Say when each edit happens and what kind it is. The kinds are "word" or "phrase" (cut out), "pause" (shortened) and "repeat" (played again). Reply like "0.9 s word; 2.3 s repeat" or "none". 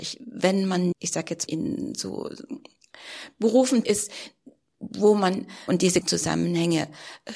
0.9 s word; 1.5 s word; 3.8 s word; 5.7 s word; 6.0 s word